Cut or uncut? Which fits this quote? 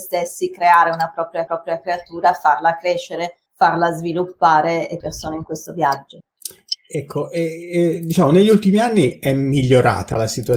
cut